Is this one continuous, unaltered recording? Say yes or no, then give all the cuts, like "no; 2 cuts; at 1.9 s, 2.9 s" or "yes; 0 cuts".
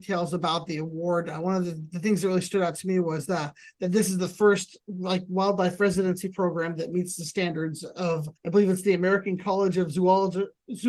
no; 1 cut; at 8.4 s